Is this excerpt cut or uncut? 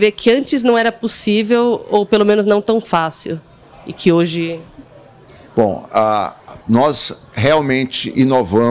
cut